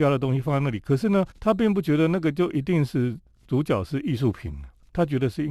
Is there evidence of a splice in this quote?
yes; 1 cut; at 1.3 s

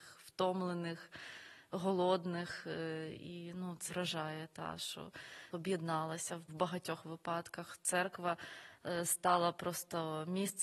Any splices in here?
yes; 3 cuts; at 3.9 s, 5.5 s, 6.5 s

